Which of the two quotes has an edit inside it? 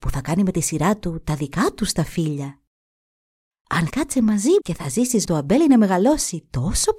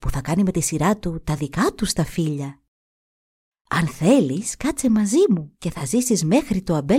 first; 3 cuts; at 3.9 s, 4.6 s, 5.2 s

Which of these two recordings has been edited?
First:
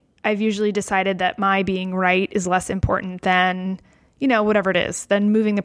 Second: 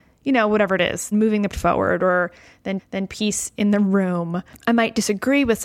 second; 3 cuts; at 1.1 s, 1.5 s, 2.8 s

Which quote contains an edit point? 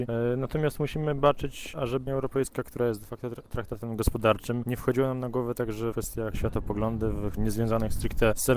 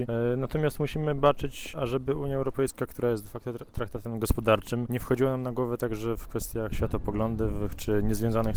first; 3 cuts; at 2.1 s, 5.9 s, 7.4 s

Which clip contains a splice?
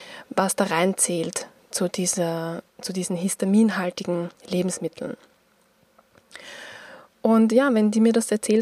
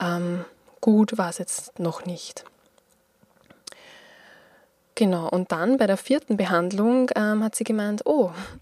first; 2 cuts; at 2.7 s, 4.4 s

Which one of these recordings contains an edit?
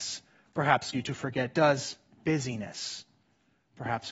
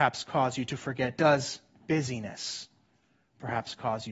first; 1 cut; at 0.9 s

